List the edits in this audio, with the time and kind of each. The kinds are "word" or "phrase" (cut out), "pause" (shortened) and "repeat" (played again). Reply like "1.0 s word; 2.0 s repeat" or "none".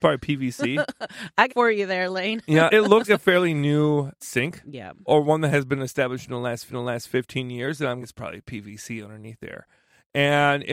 1.5 s phrase; 2.7 s word; 3.1 s word; 6.7 s repeat; 8.0 s phrase